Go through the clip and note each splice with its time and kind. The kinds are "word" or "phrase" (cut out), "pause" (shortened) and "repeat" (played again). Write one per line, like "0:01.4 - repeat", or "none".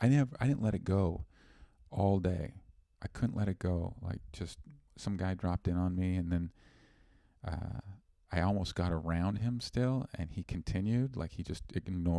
none